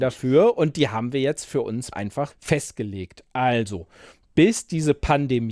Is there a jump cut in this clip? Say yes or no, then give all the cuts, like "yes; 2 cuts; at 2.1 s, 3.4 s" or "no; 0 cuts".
yes; 2 cuts; at 1.9 s, 2.3 s